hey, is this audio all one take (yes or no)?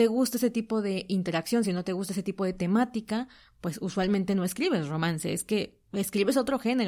yes